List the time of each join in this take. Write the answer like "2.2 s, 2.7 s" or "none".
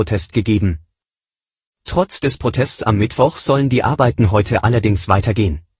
none